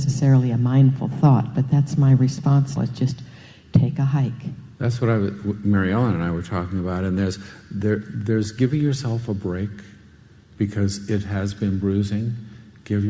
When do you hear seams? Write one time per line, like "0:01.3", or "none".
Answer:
0:02.8
0:04.8